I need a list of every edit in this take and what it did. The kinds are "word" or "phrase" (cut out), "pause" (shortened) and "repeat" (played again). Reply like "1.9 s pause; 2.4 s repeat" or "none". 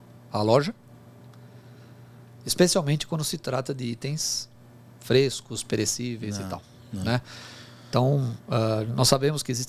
none